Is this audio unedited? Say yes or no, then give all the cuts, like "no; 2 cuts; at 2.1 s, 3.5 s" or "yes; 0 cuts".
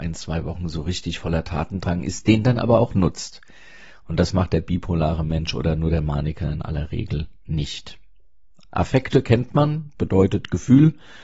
yes; 0 cuts